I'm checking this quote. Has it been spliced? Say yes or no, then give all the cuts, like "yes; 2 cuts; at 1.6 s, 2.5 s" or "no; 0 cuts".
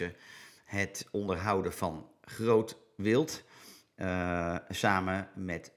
no; 0 cuts